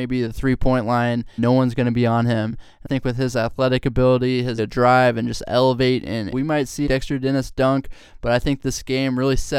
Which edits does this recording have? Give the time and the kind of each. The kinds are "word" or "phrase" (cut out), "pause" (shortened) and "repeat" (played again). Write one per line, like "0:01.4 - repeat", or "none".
0:01.4 - word
0:02.8 - word
0:04.6 - word
0:06.3 - phrase
0:06.9 - phrase